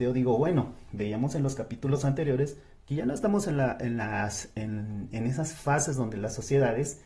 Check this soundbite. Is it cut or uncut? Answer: uncut